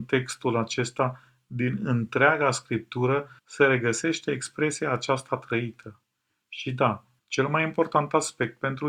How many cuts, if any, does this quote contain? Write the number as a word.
two